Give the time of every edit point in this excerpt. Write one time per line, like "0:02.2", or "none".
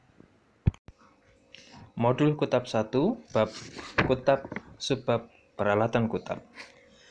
0:03.3

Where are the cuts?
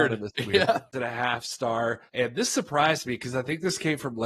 0:00.9
0:02.1

